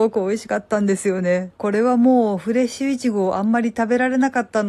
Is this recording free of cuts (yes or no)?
no